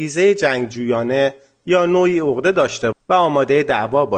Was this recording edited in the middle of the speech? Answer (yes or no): yes